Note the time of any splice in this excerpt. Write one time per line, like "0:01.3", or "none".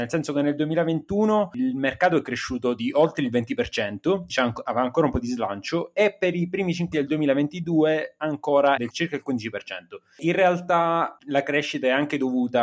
0:04.3
0:06.9
0:08.8